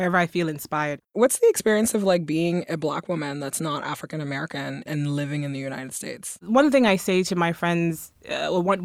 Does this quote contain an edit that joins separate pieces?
yes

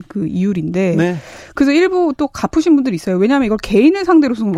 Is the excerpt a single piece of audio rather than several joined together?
yes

